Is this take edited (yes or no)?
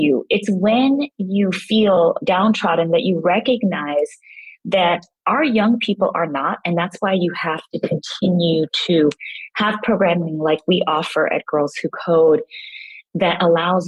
no